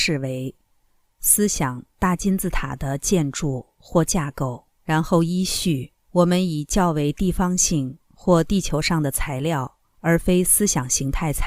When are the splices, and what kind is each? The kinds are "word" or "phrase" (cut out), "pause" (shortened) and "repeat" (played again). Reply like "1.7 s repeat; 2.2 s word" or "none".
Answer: 4.7 s pause; 6.0 s pause; 9.9 s pause

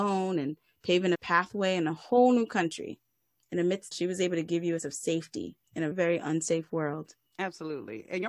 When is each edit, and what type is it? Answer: 1.1 s word; 3.9 s phrase; 4.8 s word; 5.9 s word; 7.3 s pause

